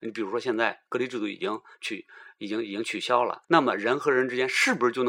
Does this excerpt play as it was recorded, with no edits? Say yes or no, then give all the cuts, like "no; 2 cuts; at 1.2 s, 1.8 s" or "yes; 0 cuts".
no; 1 cut; at 3.4 s